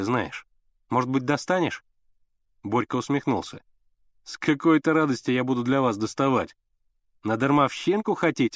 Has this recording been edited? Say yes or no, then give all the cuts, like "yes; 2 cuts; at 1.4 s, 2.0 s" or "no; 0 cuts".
no; 0 cuts